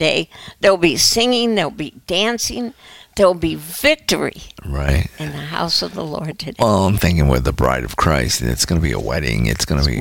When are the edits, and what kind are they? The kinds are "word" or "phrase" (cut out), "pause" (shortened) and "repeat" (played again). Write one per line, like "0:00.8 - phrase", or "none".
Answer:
none